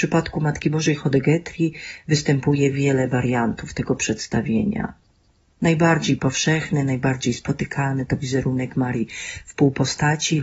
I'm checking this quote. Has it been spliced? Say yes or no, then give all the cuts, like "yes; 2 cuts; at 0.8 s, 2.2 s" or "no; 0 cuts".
no; 0 cuts